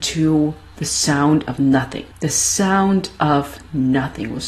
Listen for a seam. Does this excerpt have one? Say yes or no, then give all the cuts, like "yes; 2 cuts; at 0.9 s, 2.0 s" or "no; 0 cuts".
yes; 1 cut; at 2.1 s